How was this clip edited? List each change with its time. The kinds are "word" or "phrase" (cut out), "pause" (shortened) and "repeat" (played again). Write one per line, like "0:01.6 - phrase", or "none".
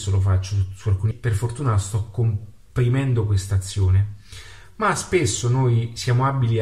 0:01.1 - word